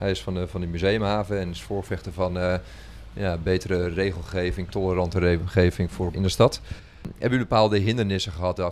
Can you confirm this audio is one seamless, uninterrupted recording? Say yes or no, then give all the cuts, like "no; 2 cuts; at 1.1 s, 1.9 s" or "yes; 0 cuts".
no; 1 cut; at 6.1 s